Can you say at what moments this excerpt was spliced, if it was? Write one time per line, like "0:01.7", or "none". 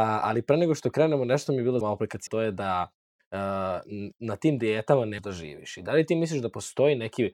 0:01.8
0:02.3
0:04.1
0:05.2